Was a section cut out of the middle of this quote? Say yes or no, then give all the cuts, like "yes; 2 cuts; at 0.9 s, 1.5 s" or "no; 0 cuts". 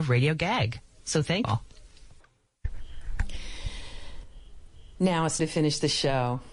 yes; 2 cuts; at 1.4 s, 5.4 s